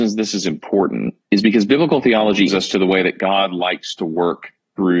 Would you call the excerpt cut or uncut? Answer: cut